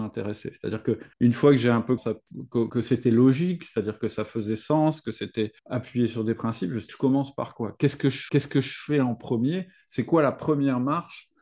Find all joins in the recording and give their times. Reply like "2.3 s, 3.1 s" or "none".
1.1 s, 2.0 s, 2.7 s, 5.6 s, 6.9 s, 8.3 s